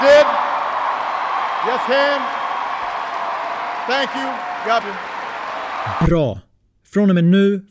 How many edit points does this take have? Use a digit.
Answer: 2